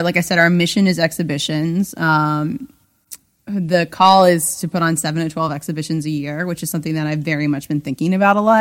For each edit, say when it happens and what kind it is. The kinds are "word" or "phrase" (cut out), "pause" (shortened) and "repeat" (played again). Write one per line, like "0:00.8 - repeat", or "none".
none

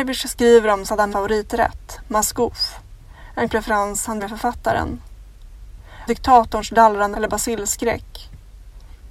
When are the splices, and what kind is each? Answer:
0:01.1 - word
0:03.5 - word
0:04.2 - word
0:06.1 - word
0:07.1 - word

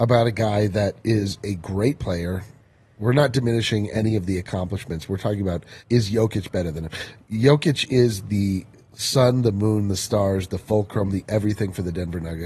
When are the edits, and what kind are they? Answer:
0:05.8 - pause

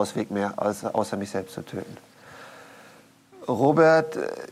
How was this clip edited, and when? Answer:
none

